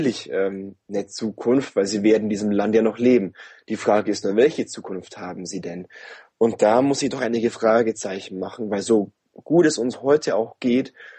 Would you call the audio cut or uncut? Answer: uncut